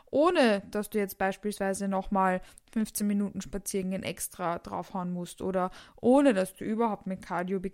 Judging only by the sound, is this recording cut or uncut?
uncut